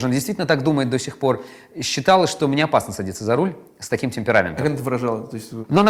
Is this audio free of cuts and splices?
yes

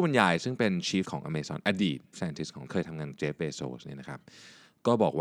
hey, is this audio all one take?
no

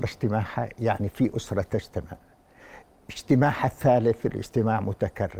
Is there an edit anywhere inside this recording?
no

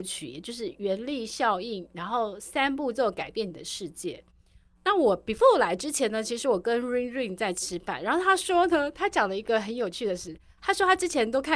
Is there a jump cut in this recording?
no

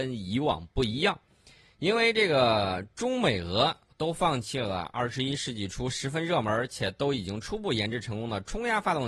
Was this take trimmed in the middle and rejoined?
no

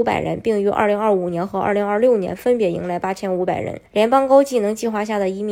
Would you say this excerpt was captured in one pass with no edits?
no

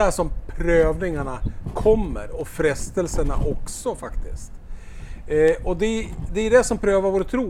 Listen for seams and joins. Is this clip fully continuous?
yes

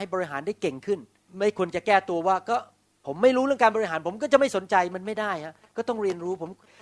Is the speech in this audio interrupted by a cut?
no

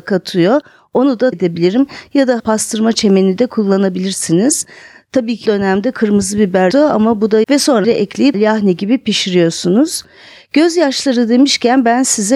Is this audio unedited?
no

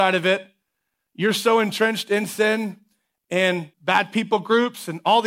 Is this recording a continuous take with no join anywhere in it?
no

